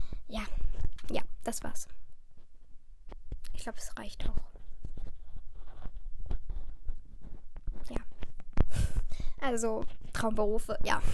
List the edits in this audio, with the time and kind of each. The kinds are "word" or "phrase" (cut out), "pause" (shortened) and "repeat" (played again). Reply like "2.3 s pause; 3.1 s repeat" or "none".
none